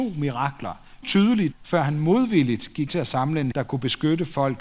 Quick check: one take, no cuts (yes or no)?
no